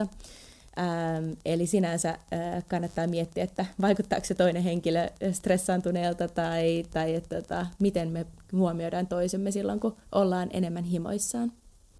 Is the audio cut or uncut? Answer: uncut